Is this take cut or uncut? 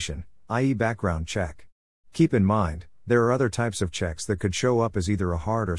cut